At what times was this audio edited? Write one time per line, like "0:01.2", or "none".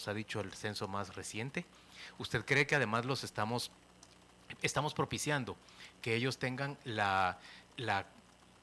none